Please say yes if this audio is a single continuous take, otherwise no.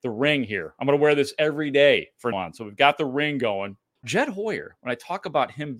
no